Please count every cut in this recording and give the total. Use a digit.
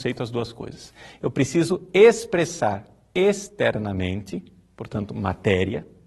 0